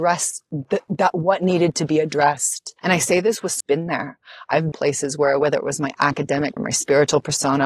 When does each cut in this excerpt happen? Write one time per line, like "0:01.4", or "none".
0:02.8
0:03.6
0:04.7
0:06.6